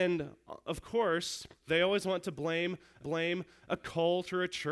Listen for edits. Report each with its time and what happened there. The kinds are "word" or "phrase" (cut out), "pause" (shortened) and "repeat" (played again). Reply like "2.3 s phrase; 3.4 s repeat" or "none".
1.7 s word; 3.0 s repeat